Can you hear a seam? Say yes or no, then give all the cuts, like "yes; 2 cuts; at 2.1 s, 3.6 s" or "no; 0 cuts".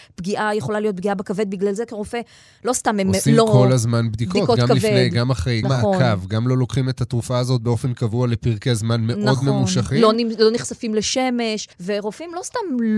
yes; 2 cuts; at 5.6 s, 11.7 s